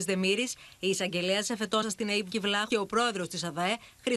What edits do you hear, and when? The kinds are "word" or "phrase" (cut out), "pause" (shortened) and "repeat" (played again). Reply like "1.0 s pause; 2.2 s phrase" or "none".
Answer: 1.8 s word; 2.3 s word; 2.7 s word